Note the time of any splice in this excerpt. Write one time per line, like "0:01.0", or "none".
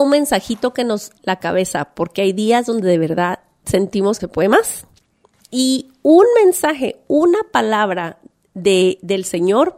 0:01.2
0:04.2